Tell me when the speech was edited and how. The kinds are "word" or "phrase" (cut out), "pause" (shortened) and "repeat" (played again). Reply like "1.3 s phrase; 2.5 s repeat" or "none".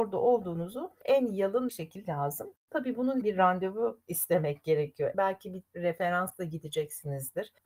1.7 s phrase; 2.0 s word; 2.6 s pause; 3.2 s phrase